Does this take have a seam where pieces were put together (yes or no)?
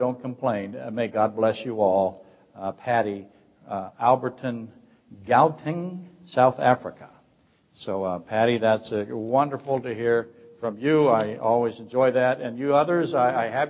no